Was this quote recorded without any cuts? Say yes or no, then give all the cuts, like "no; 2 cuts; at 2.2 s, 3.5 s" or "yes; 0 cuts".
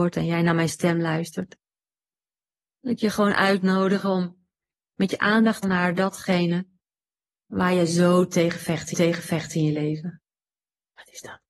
no; 2 cuts; at 5.6 s, 8.9 s